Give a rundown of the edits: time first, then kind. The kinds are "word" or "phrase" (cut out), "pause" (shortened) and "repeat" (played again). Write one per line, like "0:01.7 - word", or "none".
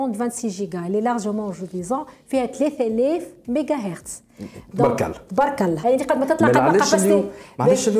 0:05.8 - word